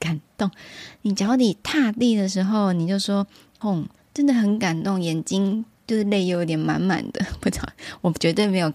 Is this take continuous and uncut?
no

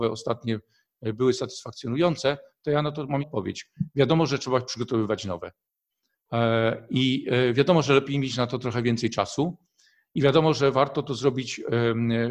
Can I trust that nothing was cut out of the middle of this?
no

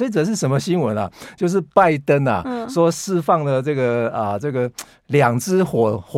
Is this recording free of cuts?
yes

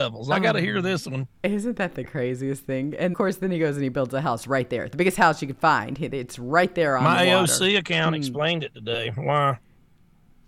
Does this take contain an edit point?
yes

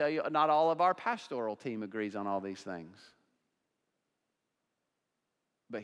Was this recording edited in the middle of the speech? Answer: no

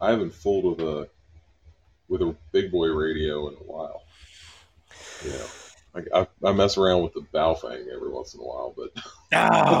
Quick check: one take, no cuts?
yes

